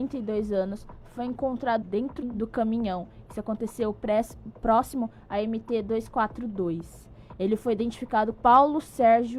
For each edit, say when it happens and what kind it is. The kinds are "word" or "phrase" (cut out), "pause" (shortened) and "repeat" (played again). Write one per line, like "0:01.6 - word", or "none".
0:01.8 - word
0:02.2 - phrase
0:08.3 - word